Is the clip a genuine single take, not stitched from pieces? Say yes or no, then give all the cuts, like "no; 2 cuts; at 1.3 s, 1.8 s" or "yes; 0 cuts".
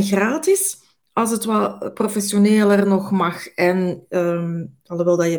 yes; 0 cuts